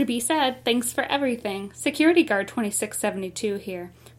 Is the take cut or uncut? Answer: uncut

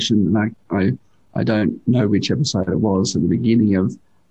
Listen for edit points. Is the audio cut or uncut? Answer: uncut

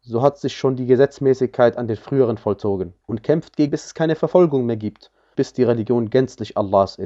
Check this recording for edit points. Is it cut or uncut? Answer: cut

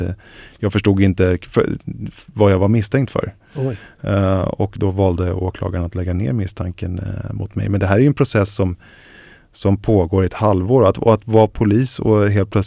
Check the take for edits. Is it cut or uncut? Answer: uncut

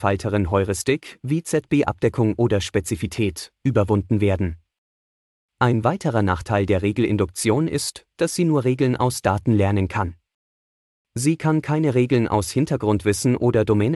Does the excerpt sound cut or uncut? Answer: uncut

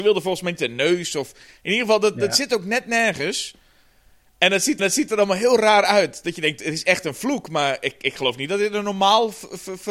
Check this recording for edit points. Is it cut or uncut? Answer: cut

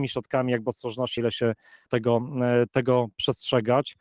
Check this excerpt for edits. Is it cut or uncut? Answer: cut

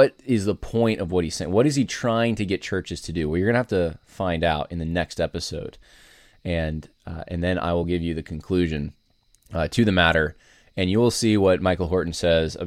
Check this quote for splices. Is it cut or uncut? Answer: uncut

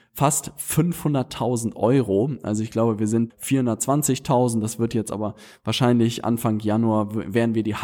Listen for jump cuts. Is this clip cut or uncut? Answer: cut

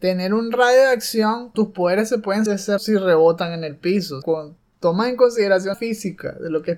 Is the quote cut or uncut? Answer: cut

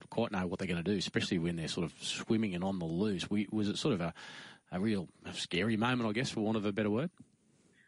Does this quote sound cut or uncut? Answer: uncut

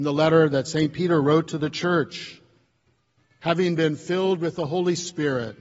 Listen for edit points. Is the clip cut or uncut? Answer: uncut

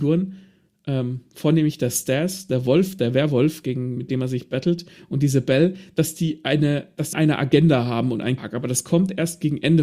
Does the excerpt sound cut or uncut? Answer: cut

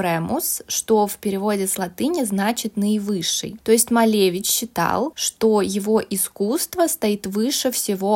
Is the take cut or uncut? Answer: uncut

